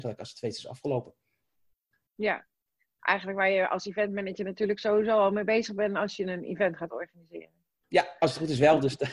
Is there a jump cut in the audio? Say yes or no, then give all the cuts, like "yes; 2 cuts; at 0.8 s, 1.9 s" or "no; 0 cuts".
no; 0 cuts